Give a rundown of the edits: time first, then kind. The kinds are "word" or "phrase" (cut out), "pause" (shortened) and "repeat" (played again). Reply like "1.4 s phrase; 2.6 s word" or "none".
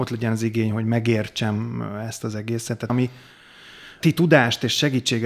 2.9 s word; 4.0 s word